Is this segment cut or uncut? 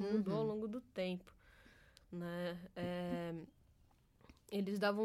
uncut